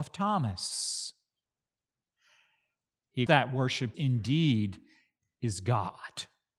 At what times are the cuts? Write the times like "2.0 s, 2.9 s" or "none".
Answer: 3.3 s, 3.9 s